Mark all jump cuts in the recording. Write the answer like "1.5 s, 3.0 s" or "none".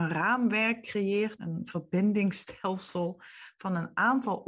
1.4 s